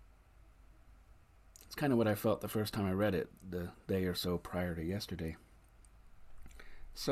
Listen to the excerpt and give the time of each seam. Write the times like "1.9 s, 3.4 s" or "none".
none